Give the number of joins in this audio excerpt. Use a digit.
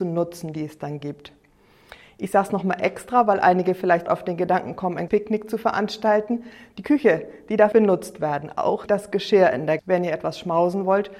5